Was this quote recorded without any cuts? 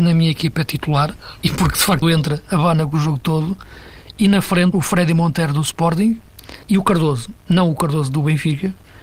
no; 4 cuts; at 1.4 s, 2.0 s, 4.7 s, 6.6 s

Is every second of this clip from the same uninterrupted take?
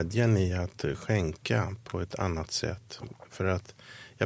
yes; 0 cuts

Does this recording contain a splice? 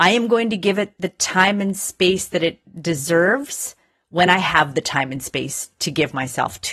no; 0 cuts

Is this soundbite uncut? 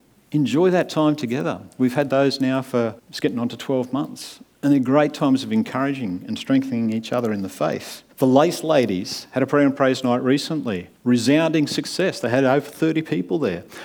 no; 3 cuts; at 3.0 s, 8.1 s, 11.0 s

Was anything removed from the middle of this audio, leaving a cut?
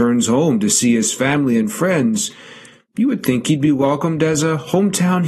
no; 0 cuts

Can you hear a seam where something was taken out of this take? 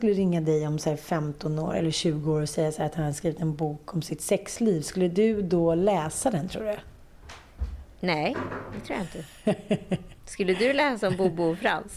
yes; 1 cut; at 10.2 s

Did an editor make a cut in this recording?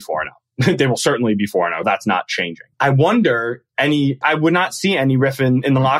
yes; 3 cuts; at 1.8 s, 2.7 s, 4.2 s

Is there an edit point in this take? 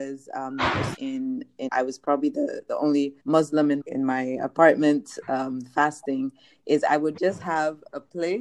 yes; 4 cuts; at 1.0 s, 1.7 s, 3.2 s, 3.8 s

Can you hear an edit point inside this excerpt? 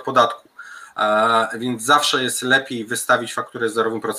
no; 0 cuts

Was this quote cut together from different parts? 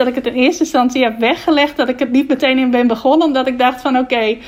no; 0 cuts

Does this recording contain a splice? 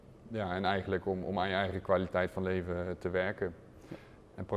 no; 0 cuts

